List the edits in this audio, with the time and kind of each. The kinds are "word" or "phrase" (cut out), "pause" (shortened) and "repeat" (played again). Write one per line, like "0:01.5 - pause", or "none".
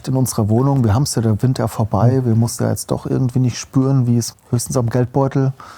0:01.6 - word
0:02.6 - word
0:04.3 - word